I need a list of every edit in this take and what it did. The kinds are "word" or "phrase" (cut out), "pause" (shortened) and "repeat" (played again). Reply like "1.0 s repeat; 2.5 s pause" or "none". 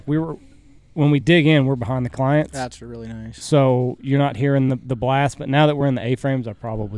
none